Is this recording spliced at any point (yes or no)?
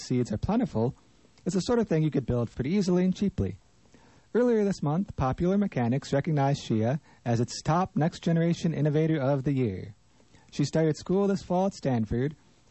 yes